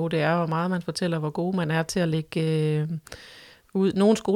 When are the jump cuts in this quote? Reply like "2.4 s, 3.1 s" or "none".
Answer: none